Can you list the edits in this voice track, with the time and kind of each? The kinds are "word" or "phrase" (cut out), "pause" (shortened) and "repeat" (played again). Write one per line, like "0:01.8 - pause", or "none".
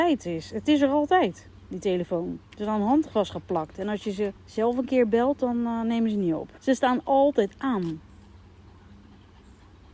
0:02.5 - pause
0:04.4 - pause
0:06.6 - pause

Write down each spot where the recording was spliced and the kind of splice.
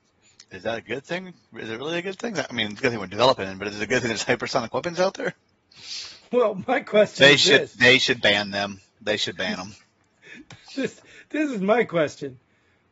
none

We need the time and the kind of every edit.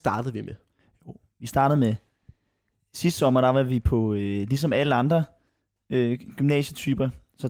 none

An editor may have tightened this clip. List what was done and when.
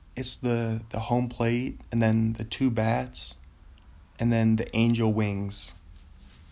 none

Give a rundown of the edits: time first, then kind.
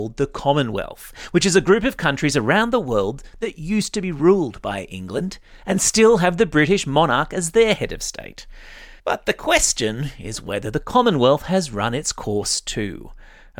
0:09.0 - pause

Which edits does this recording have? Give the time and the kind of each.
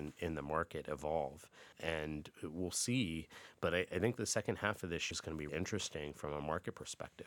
0:05.1 - word
0:05.5 - word

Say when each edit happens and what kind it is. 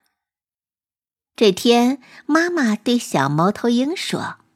none

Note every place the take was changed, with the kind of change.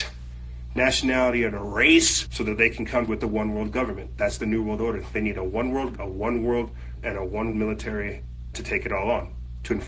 0:02.3 - word
0:03.1 - word
0:05.9 - word
0:07.0 - word
0:07.5 - word
0:08.5 - word

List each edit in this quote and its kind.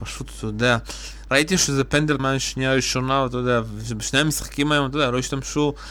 0:02.2 - word

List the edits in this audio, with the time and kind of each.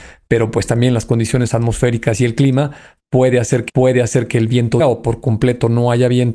0:03.7 - repeat
0:04.8 - word

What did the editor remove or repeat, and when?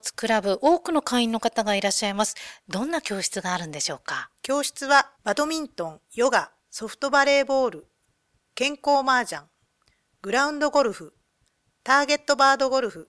0:04.4 - pause
0:05.2 - pause
0:06.0 - pause
0:06.6 - pause

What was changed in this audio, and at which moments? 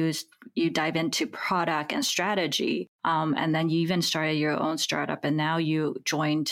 0:02.9 - pause

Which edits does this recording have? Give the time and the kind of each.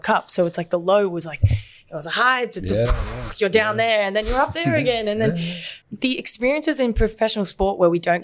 0:05.8 - pause

